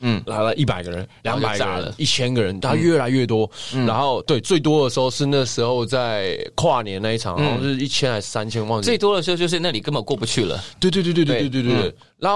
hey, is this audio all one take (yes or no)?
yes